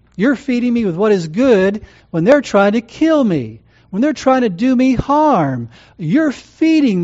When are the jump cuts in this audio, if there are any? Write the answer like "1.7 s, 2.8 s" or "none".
none